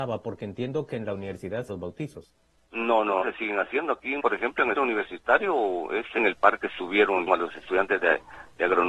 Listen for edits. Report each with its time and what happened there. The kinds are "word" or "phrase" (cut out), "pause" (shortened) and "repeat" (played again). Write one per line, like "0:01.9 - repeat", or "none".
0:01.7 - word
0:03.2 - word
0:04.2 - word
0:04.8 - word
0:06.2 - word
0:07.3 - word